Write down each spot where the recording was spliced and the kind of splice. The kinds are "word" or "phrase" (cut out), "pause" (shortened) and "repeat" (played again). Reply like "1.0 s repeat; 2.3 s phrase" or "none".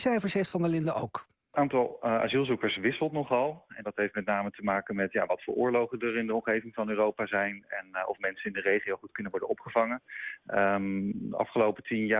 none